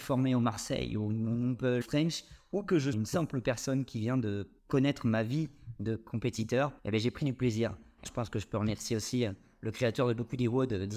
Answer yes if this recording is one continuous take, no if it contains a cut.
no